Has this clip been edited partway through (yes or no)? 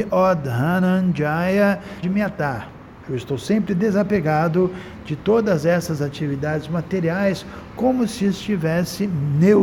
yes